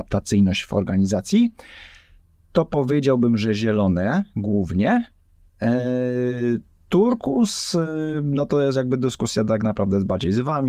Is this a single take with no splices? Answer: yes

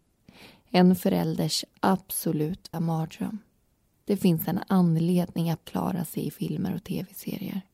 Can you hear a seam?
yes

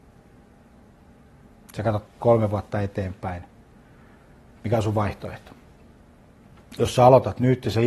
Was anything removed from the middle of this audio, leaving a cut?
yes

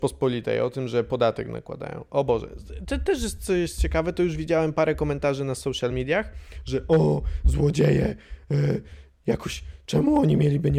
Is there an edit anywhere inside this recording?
no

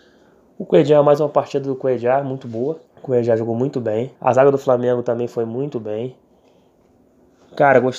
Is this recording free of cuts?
no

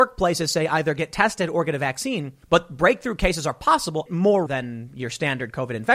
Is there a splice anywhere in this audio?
yes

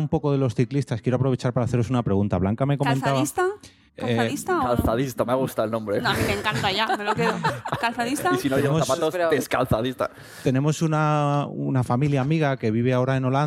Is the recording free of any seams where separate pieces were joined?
no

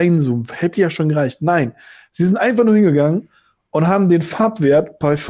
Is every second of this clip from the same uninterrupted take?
yes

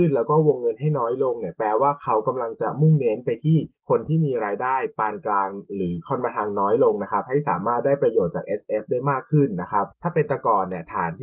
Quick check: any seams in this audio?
yes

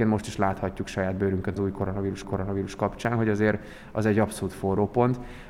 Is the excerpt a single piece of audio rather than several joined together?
no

